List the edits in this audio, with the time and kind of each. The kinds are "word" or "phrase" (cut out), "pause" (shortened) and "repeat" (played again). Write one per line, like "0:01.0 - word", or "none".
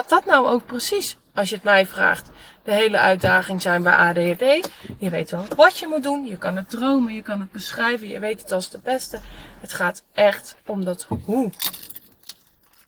0:10.6 - pause